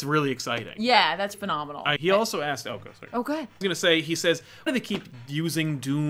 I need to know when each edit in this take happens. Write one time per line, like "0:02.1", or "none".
0:01.3
0:02.0
0:03.6
0:04.7